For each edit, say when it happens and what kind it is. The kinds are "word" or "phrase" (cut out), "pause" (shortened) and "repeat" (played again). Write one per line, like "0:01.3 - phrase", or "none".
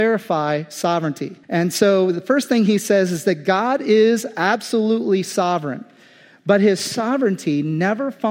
0:01.4 - pause